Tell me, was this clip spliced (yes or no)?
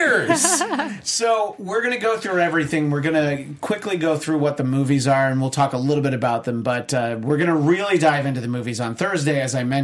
no